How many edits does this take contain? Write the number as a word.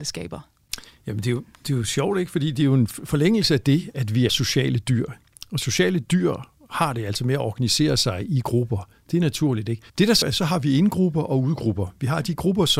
three